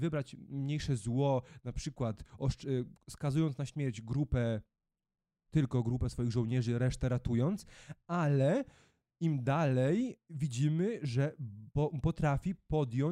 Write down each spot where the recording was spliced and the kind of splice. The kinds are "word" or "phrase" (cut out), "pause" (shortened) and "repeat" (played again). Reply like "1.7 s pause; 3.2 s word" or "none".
none

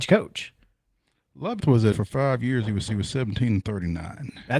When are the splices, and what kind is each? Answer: 1.6 s word; 1.9 s word; 2.9 s repeat

